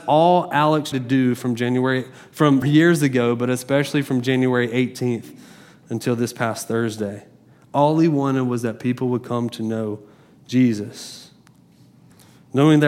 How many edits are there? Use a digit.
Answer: 2